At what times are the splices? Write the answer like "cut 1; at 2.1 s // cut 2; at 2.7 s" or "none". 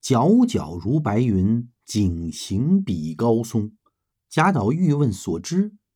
cut 1; at 4.1 s